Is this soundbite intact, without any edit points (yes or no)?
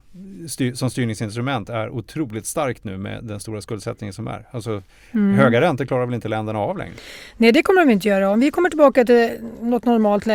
yes